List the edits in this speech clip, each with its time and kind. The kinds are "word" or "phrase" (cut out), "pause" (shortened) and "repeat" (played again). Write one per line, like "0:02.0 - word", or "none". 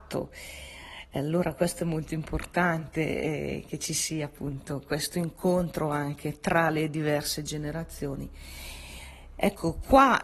none